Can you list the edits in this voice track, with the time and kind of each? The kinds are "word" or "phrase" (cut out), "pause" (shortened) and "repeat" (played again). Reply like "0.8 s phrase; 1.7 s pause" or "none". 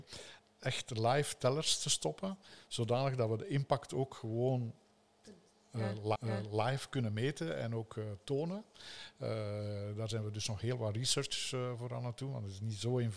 6.2 s repeat